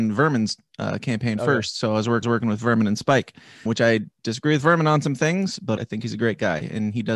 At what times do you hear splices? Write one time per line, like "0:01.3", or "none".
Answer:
0:02.2
0:03.7
0:05.8